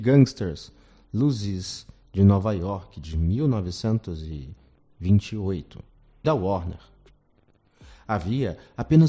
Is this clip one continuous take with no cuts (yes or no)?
no